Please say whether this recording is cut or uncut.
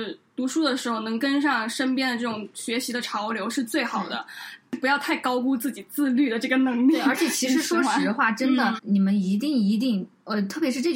cut